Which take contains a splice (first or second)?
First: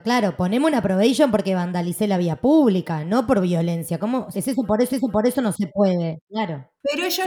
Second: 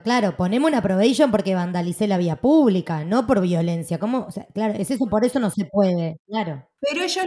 first